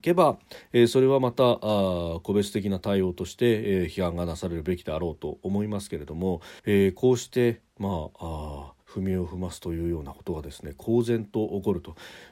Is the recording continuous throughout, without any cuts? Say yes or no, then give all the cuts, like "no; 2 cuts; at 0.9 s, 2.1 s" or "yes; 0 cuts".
no; 2 cuts; at 6.6 s, 8.8 s